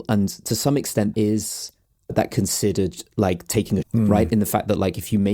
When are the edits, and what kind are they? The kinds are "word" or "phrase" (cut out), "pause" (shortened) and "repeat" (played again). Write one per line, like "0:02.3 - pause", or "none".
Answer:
0:01.1 - word
0:02.3 - phrase
0:03.1 - pause
0:03.8 - word